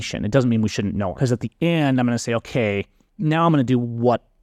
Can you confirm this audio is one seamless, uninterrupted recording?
no; 1 cut; at 1.1 s

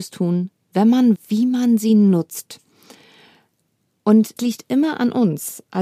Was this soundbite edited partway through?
yes; 2 cuts; at 1.2 s, 4.4 s

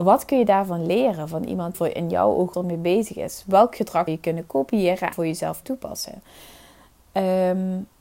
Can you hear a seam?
yes; 5 cuts; at 1.7 s, 2.5 s, 4.1 s, 5.1 s, 5.6 s

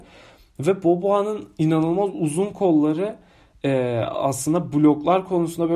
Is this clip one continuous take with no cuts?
yes; 0 cuts

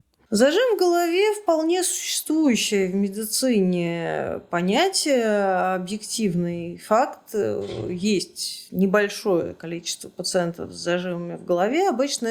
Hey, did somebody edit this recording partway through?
no; 0 cuts

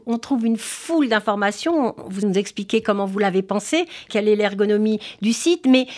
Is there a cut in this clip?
yes; 2 cuts; at 2.2 s, 4.1 s

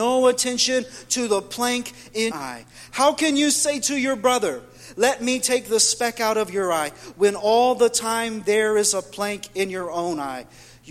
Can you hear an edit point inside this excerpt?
yes; 1 cut; at 2.3 s

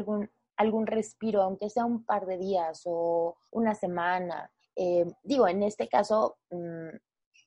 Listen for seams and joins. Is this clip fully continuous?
no; 2 cuts; at 3.5 s, 4.6 s

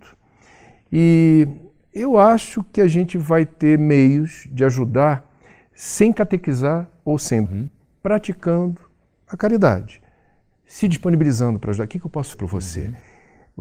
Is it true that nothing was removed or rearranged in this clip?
no; 2 cuts; at 7.5 s, 12.3 s

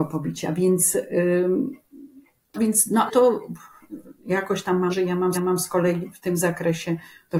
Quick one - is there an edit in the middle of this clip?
yes; 5 cuts; at 2.6 s, 3.1 s, 4.2 s, 4.9 s, 5.3 s

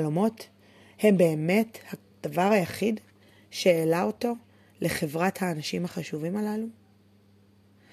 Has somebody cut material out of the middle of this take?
no; 0 cuts

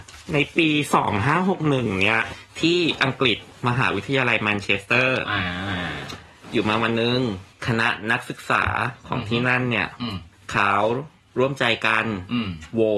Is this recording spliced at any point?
no; 0 cuts

